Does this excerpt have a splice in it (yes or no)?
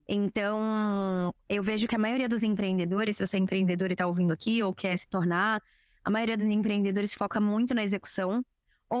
no